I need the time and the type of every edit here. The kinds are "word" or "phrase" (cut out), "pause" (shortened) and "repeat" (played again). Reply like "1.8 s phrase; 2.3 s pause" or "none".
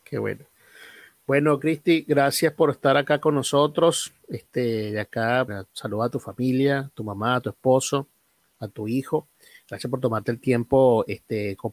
5.5 s word